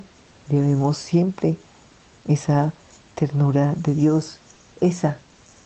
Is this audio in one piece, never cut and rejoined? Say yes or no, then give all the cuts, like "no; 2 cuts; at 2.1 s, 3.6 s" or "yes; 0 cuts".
yes; 0 cuts